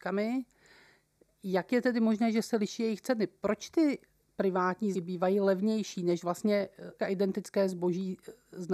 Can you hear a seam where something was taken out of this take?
yes; 2 cuts; at 4.9 s, 7.0 s

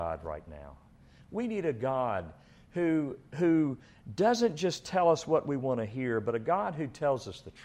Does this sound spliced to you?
no; 0 cuts

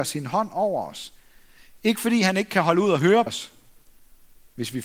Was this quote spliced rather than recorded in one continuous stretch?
yes; 1 cut; at 3.3 s

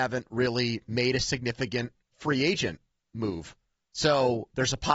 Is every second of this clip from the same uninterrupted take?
no; 1 cut; at 3.8 s

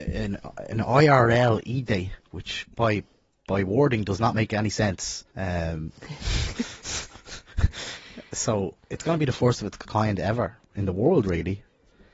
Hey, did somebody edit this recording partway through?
yes; 4 cuts; at 2.7 s, 5.3 s, 8.8 s, 10.6 s

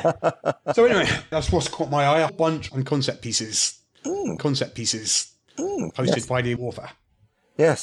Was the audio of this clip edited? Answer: yes; 5 cuts; at 1.3 s, 2.3 s, 2.7 s, 4.4 s, 6.6 s

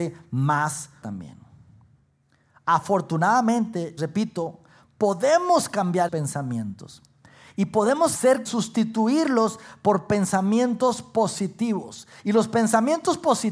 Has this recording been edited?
yes; 5 cuts; at 1.0 s, 4.0 s, 6.1 s, 8.1 s, 8.5 s

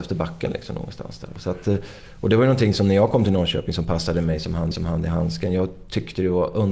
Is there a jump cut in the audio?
yes; 1 cut; at 4.7 s

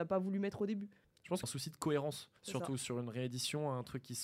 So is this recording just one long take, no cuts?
no; 3 cuts; at 1.0 s, 1.4 s, 2.4 s

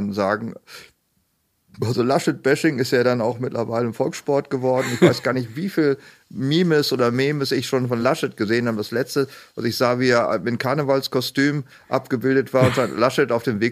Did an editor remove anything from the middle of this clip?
no; 0 cuts

